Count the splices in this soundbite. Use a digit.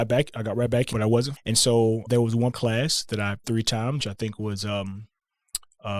6